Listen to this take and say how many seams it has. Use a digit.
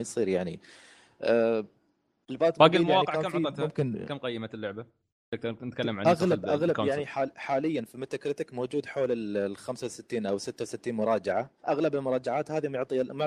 2